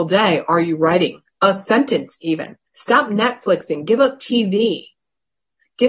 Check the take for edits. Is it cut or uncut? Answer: cut